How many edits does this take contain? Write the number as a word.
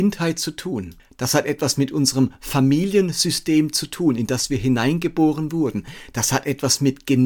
zero